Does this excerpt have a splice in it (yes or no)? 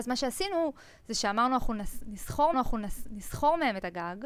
yes